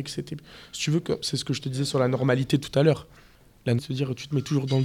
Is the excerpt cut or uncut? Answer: cut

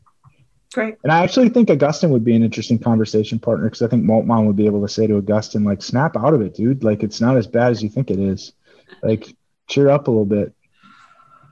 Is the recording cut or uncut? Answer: uncut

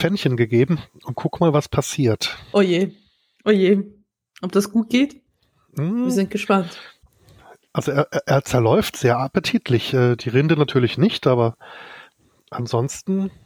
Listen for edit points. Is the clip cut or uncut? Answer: uncut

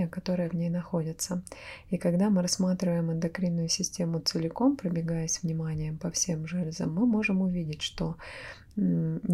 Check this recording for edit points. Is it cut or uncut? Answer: uncut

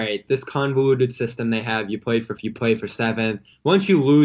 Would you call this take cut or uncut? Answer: cut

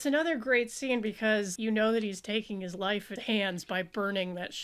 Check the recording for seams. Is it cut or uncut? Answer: cut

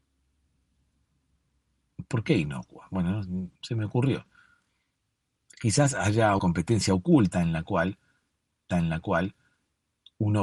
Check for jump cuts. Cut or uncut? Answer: cut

